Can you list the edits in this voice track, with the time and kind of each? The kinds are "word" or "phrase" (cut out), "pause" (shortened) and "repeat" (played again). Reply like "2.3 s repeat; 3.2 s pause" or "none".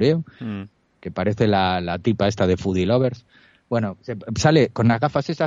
none